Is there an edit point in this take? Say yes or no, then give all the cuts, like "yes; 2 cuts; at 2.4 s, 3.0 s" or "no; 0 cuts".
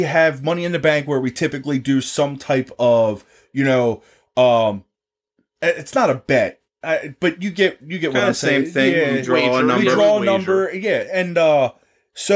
no; 0 cuts